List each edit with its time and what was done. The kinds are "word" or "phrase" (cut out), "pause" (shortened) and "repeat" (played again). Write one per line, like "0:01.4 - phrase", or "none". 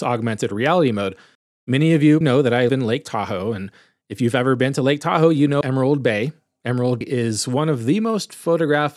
0:02.2 - word
0:02.7 - word
0:05.6 - word
0:07.0 - word